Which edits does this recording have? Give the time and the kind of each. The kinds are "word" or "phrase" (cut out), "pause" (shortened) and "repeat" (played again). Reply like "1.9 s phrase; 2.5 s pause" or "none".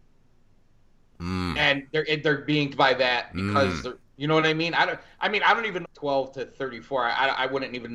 2.7 s word; 4.0 s pause; 5.8 s phrase

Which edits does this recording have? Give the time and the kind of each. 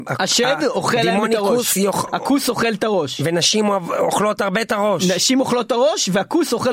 none

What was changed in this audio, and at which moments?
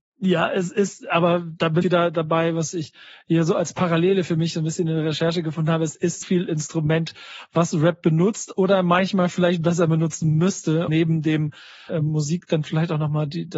1.8 s word; 6.2 s word; 10.9 s word; 11.9 s word

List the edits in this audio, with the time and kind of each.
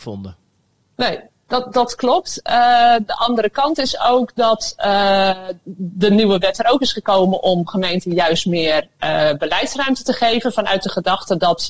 none

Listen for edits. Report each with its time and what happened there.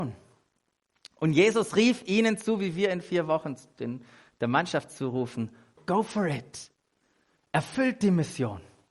none

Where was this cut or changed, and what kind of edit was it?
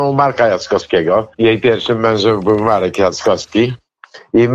1.3 s pause

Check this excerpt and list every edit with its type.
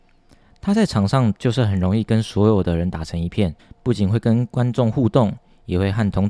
3.6 s pause

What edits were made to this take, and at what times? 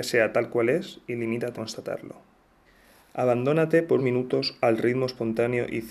1.5 s word; 2.7 s pause; 4.0 s word

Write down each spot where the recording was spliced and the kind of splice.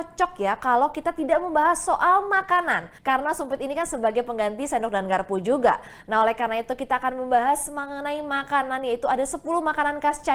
3.0 s pause

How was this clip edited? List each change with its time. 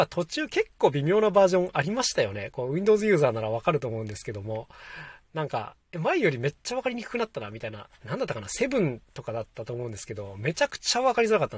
5.8 s pause; 9.0 s pause

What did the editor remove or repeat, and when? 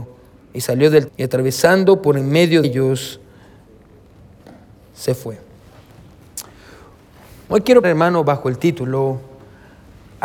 1.1 s word; 2.6 s word; 7.8 s word

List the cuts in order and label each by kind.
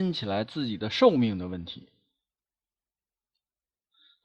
none

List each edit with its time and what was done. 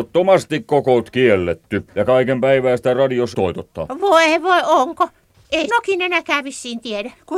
1.9 s pause; 3.3 s word; 5.7 s word

